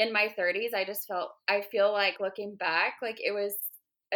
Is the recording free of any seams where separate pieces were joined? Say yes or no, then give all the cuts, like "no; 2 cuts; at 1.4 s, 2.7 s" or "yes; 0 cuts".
yes; 0 cuts